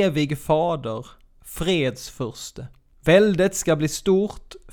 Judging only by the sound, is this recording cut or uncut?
cut